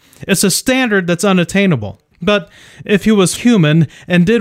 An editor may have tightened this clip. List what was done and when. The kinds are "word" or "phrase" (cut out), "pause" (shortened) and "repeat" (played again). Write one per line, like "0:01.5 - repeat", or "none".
0:02.1 - pause
0:03.4 - word